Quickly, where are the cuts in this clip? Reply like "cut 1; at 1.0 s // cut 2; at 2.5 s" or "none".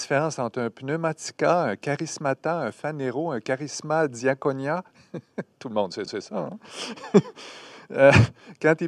cut 1; at 6.1 s